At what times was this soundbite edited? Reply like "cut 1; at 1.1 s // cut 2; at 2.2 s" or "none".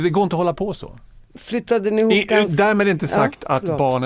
cut 1; at 1.3 s